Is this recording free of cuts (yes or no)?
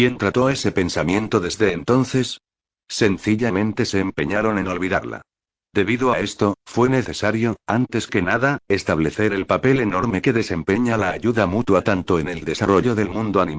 yes